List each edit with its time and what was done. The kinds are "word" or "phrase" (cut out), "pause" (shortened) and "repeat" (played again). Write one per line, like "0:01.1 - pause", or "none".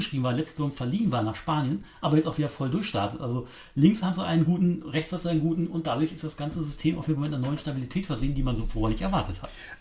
none